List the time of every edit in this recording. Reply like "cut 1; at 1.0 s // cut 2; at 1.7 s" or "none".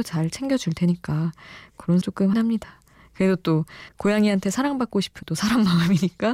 cut 1; at 2.0 s // cut 2; at 2.3 s // cut 3; at 3.9 s // cut 4; at 5.2 s